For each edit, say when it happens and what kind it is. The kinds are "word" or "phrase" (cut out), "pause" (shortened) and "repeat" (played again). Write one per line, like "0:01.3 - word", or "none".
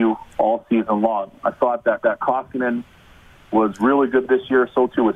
0:02.0 - repeat